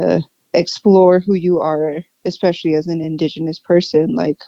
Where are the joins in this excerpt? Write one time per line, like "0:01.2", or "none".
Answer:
none